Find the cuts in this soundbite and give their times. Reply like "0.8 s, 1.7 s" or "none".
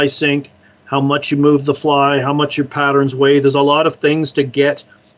none